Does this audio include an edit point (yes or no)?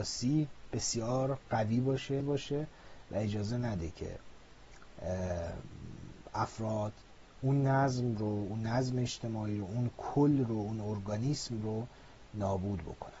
yes